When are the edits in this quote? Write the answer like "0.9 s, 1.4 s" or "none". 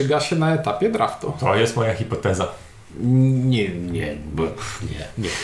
none